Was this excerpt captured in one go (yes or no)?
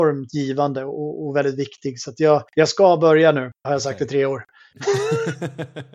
no